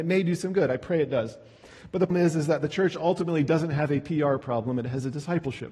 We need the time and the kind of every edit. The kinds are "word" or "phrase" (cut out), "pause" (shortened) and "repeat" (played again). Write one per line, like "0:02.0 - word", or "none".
0:02.1 - word